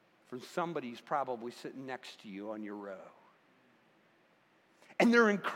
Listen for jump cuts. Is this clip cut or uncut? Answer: uncut